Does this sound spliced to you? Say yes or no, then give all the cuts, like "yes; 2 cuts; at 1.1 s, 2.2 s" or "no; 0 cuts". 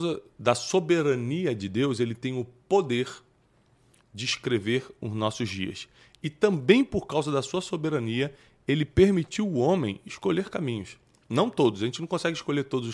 no; 0 cuts